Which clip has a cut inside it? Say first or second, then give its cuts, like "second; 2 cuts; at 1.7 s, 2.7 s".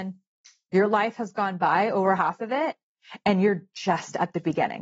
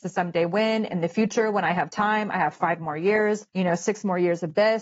second; 1 cut; at 3.5 s